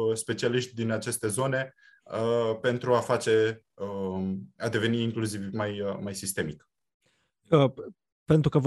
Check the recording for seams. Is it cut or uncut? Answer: uncut